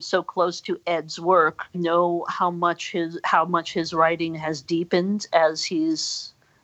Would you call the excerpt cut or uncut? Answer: cut